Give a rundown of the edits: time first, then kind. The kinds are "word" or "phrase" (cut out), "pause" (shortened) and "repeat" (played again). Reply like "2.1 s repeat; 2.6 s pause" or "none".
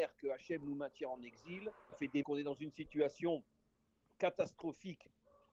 1.9 s word; 2.2 s word